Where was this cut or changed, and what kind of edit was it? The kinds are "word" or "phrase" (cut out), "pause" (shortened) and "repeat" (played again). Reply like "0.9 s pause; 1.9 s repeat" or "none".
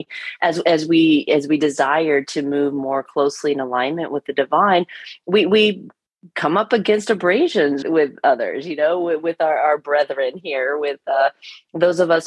7.8 s word